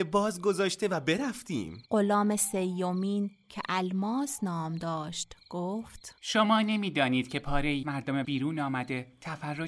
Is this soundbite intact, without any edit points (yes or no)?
no